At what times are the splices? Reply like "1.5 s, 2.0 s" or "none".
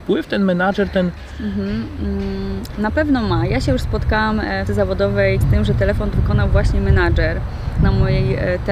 4.7 s, 5.4 s, 6.1 s, 7.8 s